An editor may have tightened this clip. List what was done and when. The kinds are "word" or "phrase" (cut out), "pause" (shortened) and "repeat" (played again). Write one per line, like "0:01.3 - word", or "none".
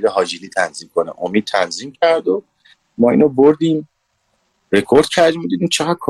none